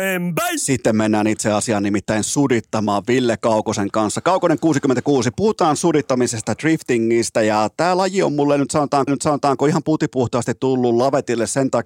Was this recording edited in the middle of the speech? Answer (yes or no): yes